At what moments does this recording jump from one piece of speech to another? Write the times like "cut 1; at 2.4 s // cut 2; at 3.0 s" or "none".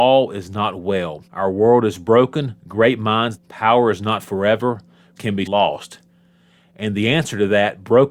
cut 1; at 1.3 s // cut 2; at 2.6 s // cut 3; at 3.4 s // cut 4; at 5.2 s // cut 5; at 5.5 s